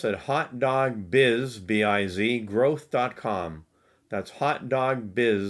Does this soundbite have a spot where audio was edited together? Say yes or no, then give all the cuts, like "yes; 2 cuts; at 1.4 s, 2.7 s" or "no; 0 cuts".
no; 0 cuts